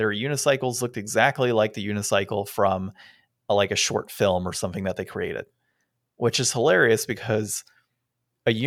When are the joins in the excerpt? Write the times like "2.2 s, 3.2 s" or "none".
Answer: none